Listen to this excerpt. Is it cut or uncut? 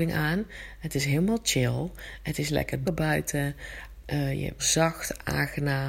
cut